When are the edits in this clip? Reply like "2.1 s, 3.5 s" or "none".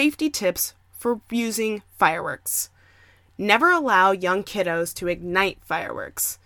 none